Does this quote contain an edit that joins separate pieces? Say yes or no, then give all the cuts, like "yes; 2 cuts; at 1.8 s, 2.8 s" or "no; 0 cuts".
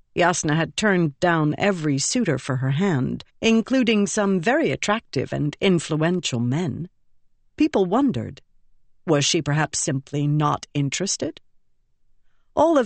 yes; 1 cut; at 3.3 s